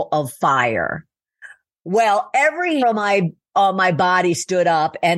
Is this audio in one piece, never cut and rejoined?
no; 1 cut; at 2.8 s

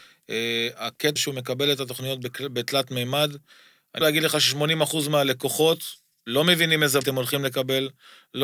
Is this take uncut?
no; 3 cuts; at 1.2 s, 4.0 s, 7.0 s

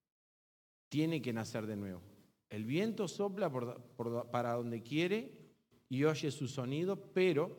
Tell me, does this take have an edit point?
no; 0 cuts

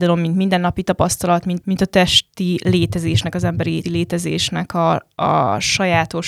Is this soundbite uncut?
no; 2 cuts; at 1.6 s, 3.8 s

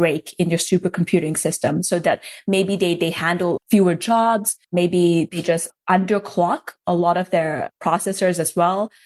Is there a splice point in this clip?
yes; 1 cut; at 4.6 s

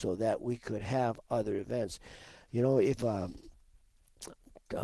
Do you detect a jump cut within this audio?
yes; 1 cut; at 3.0 s

